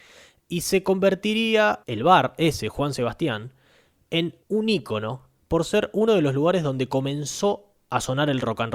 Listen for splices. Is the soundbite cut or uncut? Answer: cut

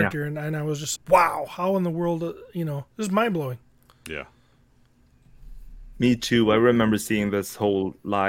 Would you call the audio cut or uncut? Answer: cut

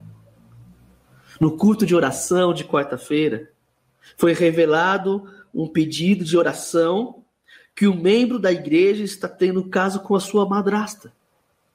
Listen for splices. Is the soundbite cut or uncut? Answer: uncut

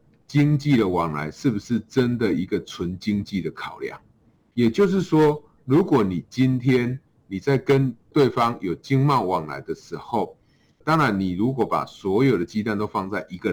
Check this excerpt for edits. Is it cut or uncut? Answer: uncut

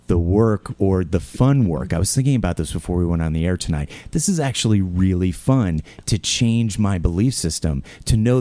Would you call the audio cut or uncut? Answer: uncut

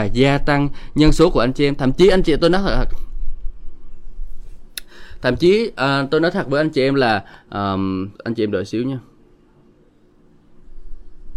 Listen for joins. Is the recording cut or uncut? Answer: cut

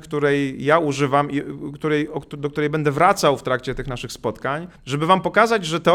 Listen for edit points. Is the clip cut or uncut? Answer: cut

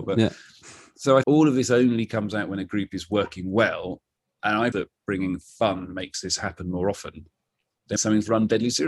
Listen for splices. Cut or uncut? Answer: cut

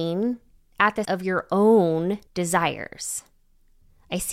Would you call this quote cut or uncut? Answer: cut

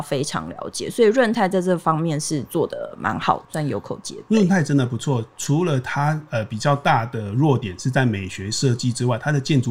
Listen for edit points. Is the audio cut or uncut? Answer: cut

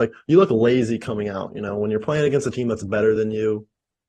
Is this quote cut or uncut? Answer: uncut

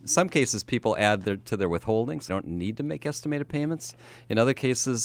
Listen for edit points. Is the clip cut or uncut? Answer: cut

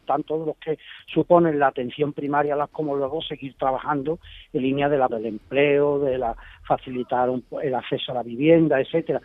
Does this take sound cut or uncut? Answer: cut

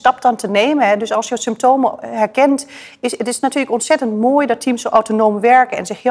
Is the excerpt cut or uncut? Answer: uncut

